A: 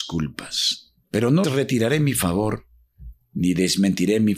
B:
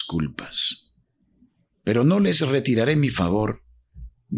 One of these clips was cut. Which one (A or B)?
A